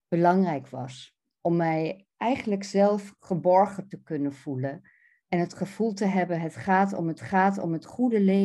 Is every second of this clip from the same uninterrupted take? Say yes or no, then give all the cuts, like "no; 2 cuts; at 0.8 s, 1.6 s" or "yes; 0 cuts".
no; 2 cuts; at 2.1 s, 7.2 s